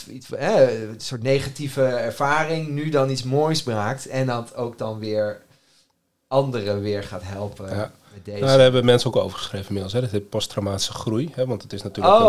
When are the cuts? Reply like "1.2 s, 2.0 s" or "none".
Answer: 9.1 s

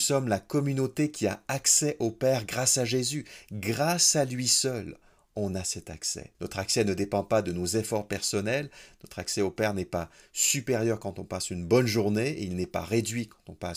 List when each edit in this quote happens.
6.3 s

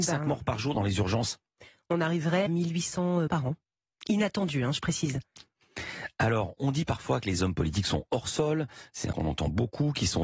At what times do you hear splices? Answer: 2.5 s, 3.3 s, 9.1 s

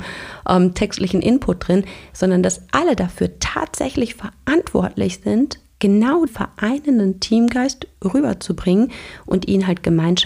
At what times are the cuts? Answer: 6.3 s

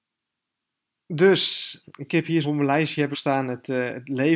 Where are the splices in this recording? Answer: 1.8 s, 2.4 s, 3.1 s

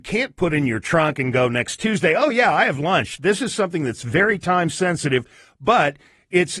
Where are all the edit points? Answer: none

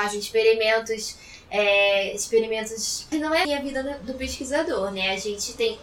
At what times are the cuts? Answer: 3.1 s, 3.4 s

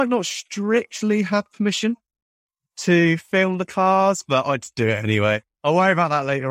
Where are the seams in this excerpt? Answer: none

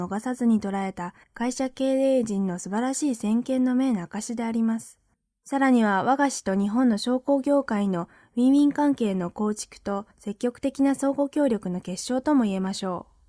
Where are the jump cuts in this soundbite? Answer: 1.2 s, 5.1 s, 10.1 s

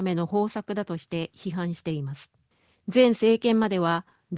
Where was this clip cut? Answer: 2.5 s

